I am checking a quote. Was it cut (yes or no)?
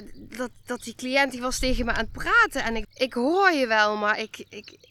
yes